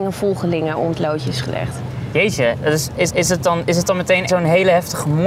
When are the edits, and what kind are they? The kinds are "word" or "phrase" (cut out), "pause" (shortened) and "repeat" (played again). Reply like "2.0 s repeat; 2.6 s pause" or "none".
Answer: 3.1 s repeat; 4.3 s word